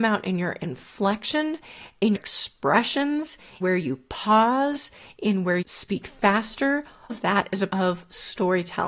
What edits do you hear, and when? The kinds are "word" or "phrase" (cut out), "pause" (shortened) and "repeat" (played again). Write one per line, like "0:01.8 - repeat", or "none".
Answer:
0:02.1 - word
0:03.6 - word
0:05.6 - word
0:07.1 - word
0:07.7 - word